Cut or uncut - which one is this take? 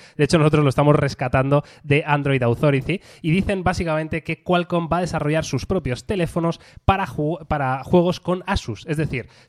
uncut